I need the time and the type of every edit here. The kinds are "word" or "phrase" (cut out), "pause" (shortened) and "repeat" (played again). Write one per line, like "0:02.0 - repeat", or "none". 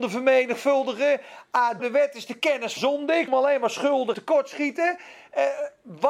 0:01.8 - word
0:02.8 - word
0:03.3 - word
0:04.1 - word